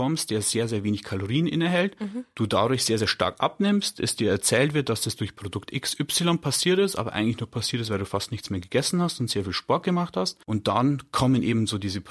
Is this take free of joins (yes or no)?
no